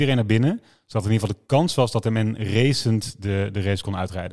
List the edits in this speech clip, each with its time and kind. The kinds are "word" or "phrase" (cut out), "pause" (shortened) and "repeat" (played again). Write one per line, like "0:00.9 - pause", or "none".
none